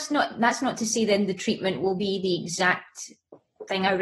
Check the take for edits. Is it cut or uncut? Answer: uncut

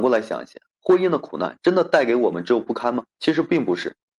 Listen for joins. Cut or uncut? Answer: cut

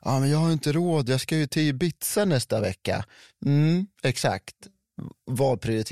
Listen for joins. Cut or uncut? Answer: cut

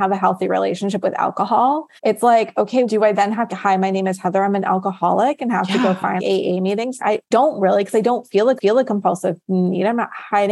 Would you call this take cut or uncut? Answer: cut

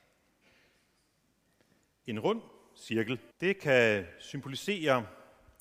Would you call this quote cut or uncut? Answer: cut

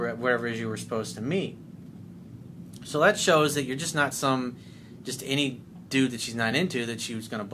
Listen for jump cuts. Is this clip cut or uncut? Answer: uncut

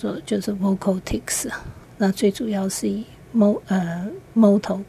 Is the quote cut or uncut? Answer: uncut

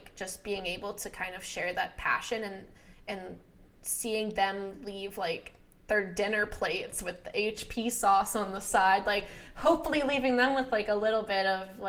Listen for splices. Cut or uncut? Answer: uncut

